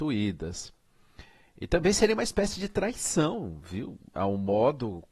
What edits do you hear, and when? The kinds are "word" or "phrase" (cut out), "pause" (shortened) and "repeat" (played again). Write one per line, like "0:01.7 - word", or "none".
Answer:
none